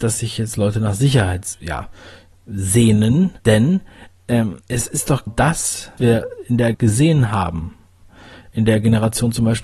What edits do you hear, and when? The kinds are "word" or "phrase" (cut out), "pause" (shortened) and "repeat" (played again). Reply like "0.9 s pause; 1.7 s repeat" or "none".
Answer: 1.5 s word; 3.4 s pause; 4.6 s pause; 5.3 s word; 6.0 s word; 6.7 s phrase